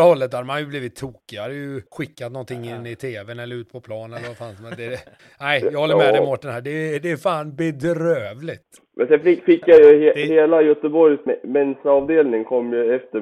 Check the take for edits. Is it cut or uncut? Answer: cut